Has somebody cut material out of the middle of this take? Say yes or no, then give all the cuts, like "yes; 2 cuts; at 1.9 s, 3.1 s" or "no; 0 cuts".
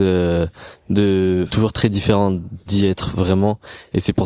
yes; 1 cut; at 1.5 s